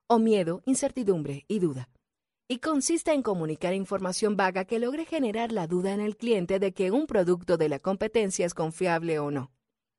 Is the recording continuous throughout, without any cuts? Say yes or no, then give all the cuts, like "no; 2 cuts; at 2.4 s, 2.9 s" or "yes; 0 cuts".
yes; 0 cuts